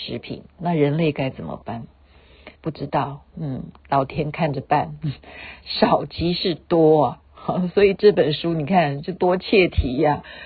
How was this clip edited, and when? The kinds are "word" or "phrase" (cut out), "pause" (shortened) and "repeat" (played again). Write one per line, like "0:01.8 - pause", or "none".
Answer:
0:02.5 - pause
0:03.3 - pause